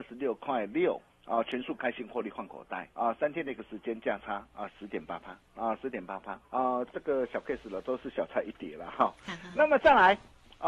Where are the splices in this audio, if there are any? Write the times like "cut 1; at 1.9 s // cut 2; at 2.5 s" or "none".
cut 1; at 1.1 s // cut 2; at 2.9 s // cut 3; at 5.5 s // cut 4; at 6.4 s